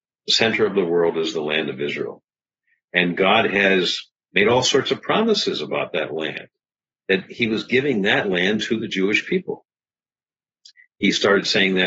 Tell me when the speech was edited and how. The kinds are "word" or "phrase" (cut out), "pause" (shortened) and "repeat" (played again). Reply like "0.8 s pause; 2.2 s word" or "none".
none

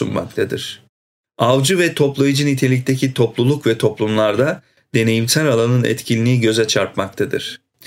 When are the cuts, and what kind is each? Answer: none

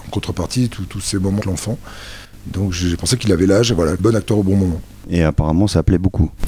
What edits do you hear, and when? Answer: 1.4 s word; 4.0 s phrase

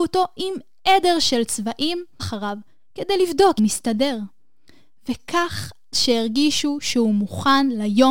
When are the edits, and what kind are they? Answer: 2.2 s word; 3.6 s phrase; 5.9 s word

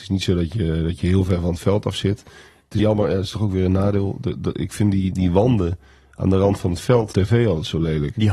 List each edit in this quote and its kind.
2.8 s word; 5.1 s word; 7.1 s word

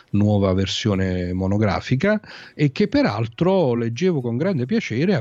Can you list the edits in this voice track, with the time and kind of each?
none

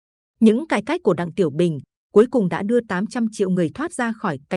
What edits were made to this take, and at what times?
none

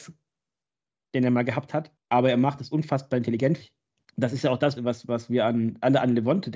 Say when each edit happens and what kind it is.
2.0 s pause; 3.6 s word; 4.8 s word

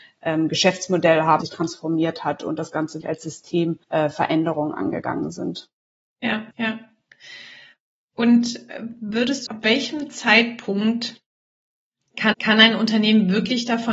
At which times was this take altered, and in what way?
1.4 s word; 3.0 s word; 3.8 s pause; 6.5 s pause; 9.5 s phrase; 12.3 s repeat

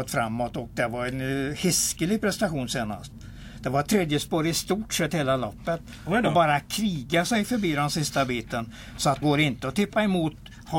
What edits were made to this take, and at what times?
9.2 s word

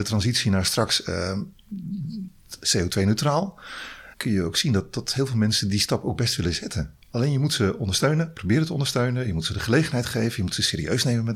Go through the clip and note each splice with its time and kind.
4.1 s pause; 7.0 s pause

